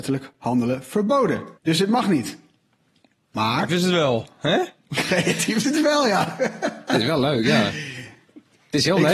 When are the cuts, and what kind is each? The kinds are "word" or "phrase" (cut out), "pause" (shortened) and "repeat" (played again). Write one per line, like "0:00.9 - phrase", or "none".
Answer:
0:01.6 - pause
0:03.7 - word
0:05.6 - word